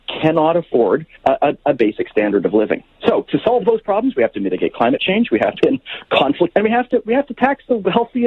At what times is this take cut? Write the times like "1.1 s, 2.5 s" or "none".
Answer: 1.2 s, 5.6 s, 6.5 s